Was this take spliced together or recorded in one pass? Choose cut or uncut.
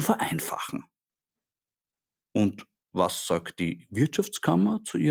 uncut